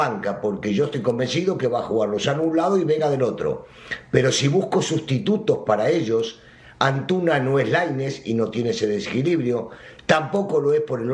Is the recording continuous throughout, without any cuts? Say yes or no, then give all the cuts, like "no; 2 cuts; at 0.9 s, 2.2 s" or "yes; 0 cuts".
yes; 0 cuts